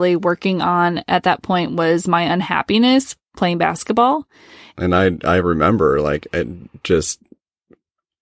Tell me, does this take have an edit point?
no; 0 cuts

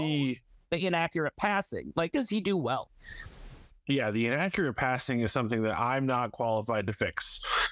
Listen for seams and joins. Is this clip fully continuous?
no; 1 cut; at 2.1 s

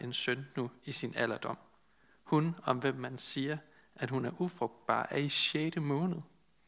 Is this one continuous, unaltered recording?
yes; 0 cuts

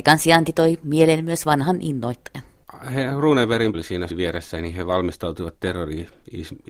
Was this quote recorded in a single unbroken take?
no; 2 cuts; at 3.7 s, 4.1 s

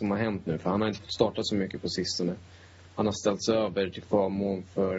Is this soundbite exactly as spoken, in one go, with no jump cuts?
yes; 0 cuts

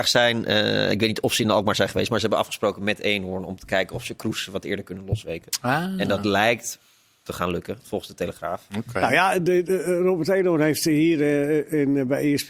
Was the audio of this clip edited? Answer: no; 0 cuts

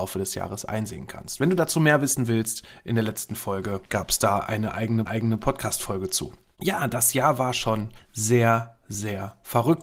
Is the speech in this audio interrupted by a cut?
yes; 1 cut; at 5.1 s

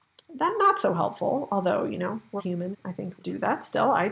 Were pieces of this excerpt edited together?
yes; 3 cuts; at 2.4 s, 2.7 s, 3.2 s

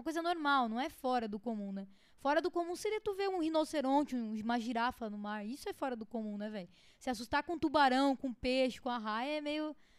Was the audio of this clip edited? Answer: no; 0 cuts

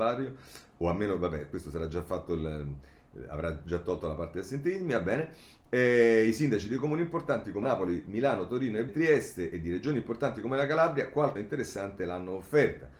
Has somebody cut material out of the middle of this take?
yes; 3 cuts; at 7.6 s, 8.9 s, 11.4 s

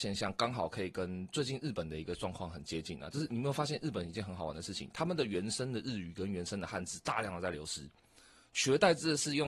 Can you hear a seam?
no; 0 cuts

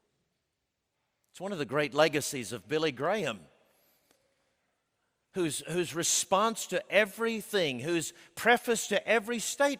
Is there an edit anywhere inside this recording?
no; 0 cuts

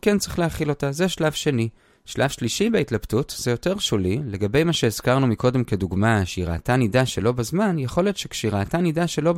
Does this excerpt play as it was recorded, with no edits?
yes; 0 cuts

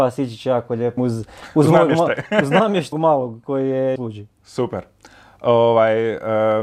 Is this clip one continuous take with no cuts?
no; 3 cuts; at 1.0 s, 2.9 s, 4.0 s

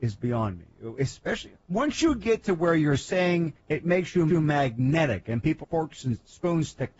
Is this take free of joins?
no; 4 cuts; at 1.6 s, 3.6 s, 4.3 s, 5.6 s

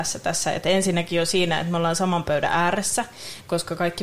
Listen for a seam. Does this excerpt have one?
no; 0 cuts

